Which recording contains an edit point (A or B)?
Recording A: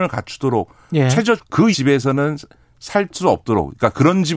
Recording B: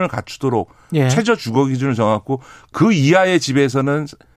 A